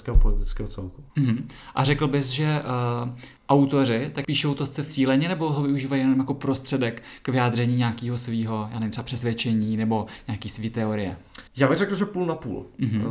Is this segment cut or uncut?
cut